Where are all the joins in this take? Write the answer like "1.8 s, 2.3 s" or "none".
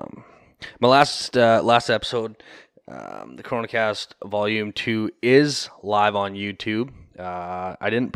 none

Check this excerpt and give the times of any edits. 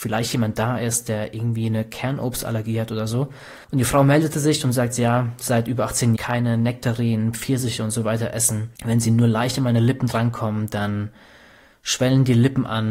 3.6 s, 6.2 s, 8.8 s

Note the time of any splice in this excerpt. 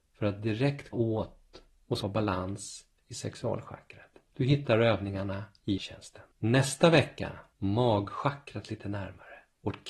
0.9 s, 2.0 s, 4.3 s, 5.8 s, 6.3 s, 7.5 s

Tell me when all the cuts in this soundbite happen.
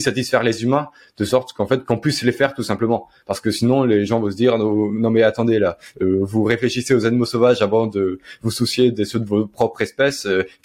none

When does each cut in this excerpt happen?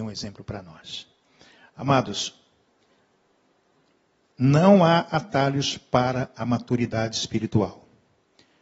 none

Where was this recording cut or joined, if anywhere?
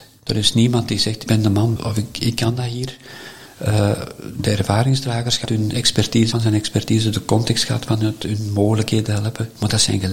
1.3 s, 1.8 s, 5.5 s, 6.3 s

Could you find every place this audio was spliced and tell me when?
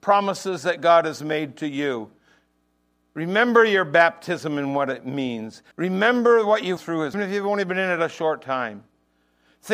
5.7 s, 6.8 s, 7.1 s

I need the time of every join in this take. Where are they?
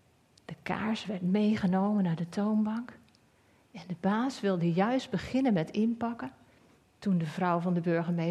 none

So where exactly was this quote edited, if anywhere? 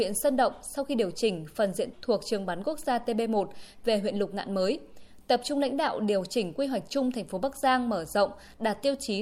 1.9 s

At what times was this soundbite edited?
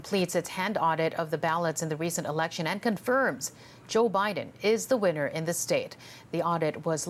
none

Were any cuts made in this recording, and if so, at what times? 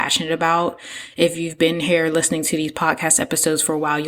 none

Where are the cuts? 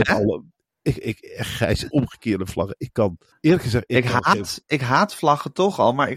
1.9 s, 3.3 s

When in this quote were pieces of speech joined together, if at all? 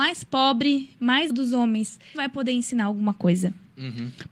1.3 s, 2.1 s

